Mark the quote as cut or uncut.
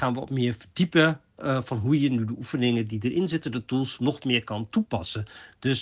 uncut